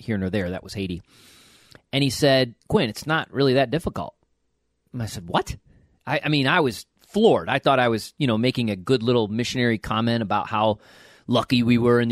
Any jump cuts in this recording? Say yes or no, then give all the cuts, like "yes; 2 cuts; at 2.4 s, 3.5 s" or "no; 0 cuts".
yes; 1 cut; at 2.6 s